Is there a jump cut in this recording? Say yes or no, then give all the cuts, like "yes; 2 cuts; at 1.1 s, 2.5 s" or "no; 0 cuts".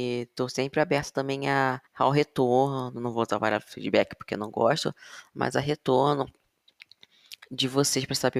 yes; 1 cut; at 1.9 s